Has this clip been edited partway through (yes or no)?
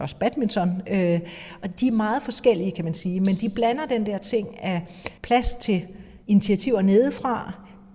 yes